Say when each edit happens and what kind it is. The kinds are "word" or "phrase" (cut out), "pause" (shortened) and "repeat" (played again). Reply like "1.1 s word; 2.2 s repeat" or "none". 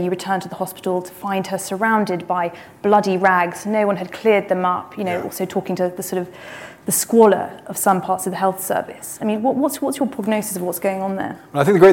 none